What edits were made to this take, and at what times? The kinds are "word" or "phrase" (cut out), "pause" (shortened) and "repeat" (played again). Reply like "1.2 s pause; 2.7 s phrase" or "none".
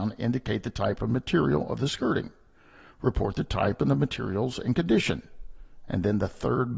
none

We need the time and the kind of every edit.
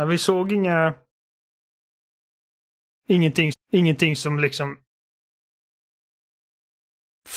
3.5 s repeat

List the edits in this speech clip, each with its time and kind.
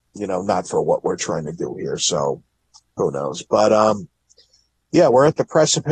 2.6 s pause

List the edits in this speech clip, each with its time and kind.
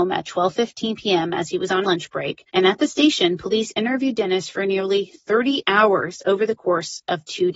1.8 s word; 2.5 s pause

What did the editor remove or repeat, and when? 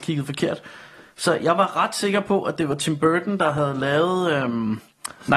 none

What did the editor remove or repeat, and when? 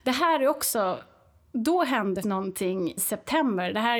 2.2 s word; 3.0 s word

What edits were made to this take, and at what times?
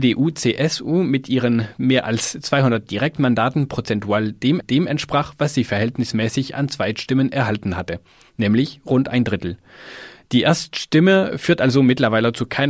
4.6 s repeat

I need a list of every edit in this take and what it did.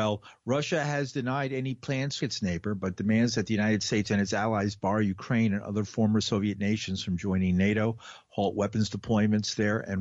2.2 s phrase

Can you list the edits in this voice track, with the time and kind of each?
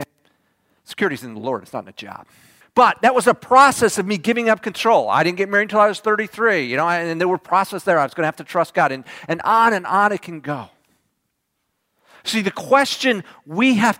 2.6 s pause

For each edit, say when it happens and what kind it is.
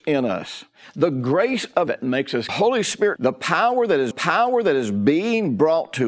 1.9 s word; 2.5 s phrase; 3.2 s phrase; 4.1 s repeat

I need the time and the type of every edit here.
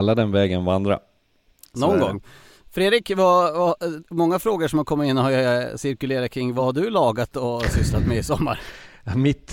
none

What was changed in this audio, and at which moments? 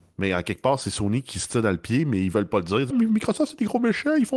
2.9 s word

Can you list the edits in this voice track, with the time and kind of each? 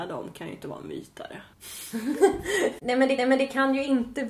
1.5 s pause; 3.2 s repeat

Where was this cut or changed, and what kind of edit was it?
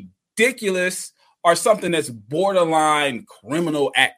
none

